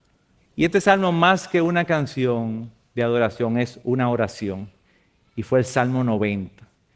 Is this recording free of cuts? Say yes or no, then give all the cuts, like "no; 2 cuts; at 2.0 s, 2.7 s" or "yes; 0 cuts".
yes; 0 cuts